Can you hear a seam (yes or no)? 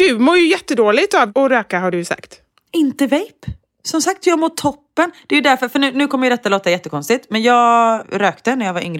no